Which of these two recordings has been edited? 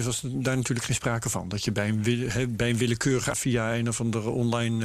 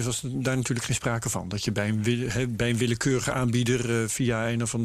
first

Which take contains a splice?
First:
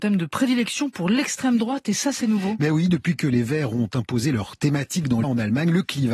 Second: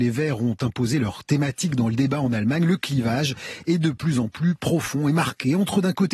first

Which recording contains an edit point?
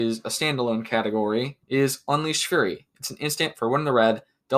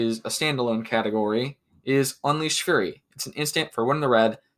first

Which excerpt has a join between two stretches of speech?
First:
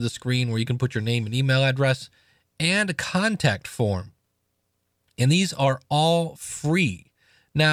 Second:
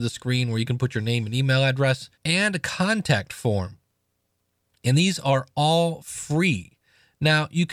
second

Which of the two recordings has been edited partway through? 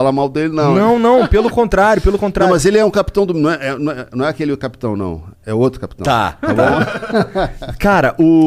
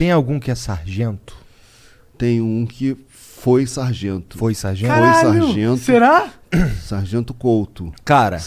first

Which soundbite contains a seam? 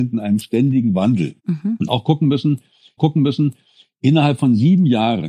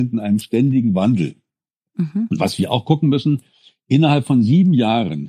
first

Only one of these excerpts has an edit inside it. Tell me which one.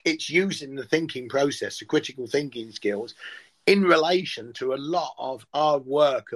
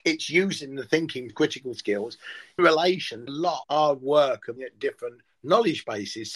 second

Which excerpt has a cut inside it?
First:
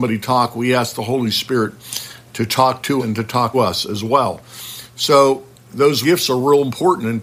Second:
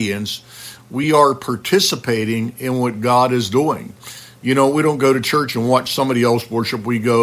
first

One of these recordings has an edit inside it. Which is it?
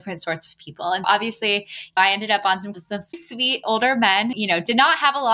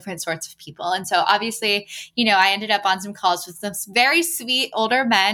first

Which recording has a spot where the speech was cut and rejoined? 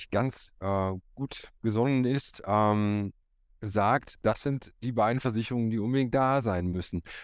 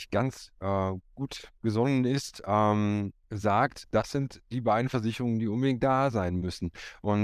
second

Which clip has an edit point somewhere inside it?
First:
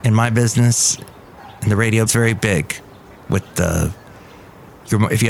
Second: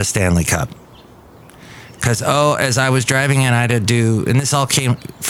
first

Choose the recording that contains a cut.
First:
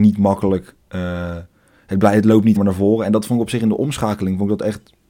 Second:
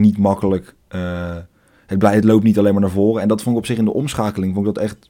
first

